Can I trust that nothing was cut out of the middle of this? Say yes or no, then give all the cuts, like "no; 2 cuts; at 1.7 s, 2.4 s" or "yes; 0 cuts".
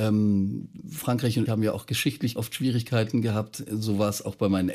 no; 2 cuts; at 1.5 s, 2.4 s